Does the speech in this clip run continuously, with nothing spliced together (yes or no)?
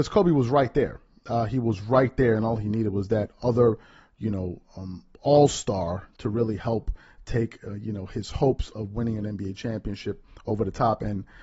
yes